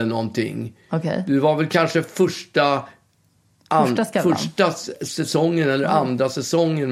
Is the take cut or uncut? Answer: uncut